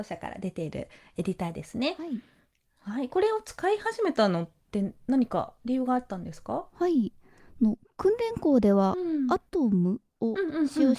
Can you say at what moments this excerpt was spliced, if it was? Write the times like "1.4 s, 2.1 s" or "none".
none